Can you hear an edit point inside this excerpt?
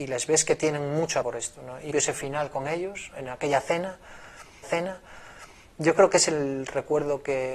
yes; 3 cuts; at 1.2 s, 1.9 s, 4.6 s

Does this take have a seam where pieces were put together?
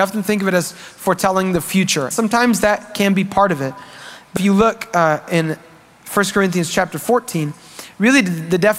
yes; 2 cuts; at 2.1 s, 4.4 s

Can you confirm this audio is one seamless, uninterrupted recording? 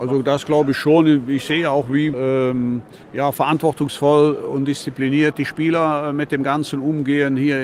yes; 0 cuts

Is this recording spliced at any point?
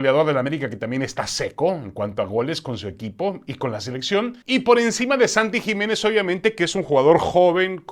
yes; 1 cut; at 4.4 s

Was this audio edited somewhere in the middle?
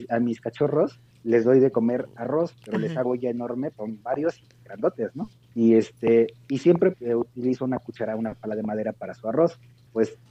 yes; 3 cuts; at 3.0 s, 3.7 s, 6.9 s

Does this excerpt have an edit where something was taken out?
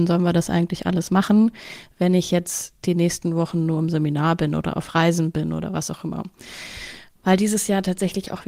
no; 0 cuts

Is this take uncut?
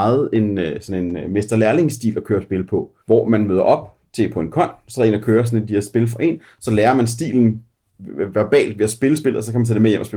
no; 1 cut; at 3.0 s

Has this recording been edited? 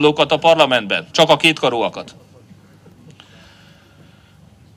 yes; 1 cut; at 1.1 s

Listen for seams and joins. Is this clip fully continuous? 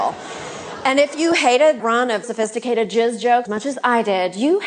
no; 3 cuts; at 1.8 s, 2.2 s, 3.5 s

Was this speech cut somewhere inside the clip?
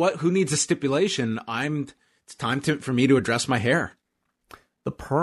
no; 0 cuts

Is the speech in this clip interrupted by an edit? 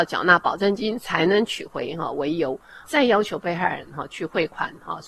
yes; 1 cut; at 2.8 s

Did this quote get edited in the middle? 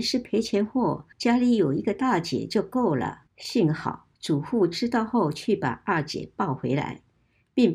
yes; 3 cuts; at 1.1 s, 3.3 s, 4.1 s

